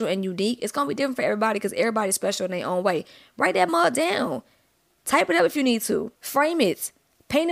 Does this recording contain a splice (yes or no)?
yes